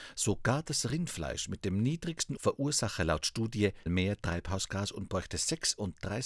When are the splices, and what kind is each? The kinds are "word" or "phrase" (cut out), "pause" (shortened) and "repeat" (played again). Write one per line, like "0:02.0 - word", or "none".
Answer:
0:02.4 - word
0:03.9 - word